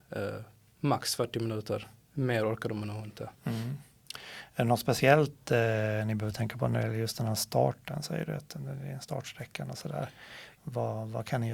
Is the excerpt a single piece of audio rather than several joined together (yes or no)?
no